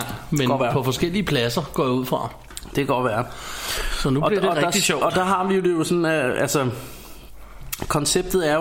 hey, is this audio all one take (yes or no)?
yes